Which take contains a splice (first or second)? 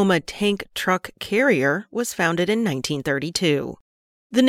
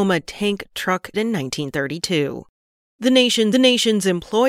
second